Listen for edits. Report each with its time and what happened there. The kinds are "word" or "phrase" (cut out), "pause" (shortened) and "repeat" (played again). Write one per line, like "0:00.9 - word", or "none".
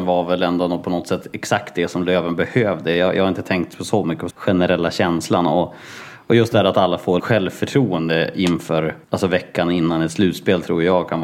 0:04.3 - phrase
0:07.2 - word
0:09.0 - pause